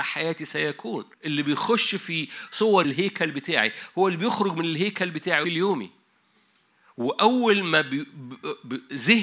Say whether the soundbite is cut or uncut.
cut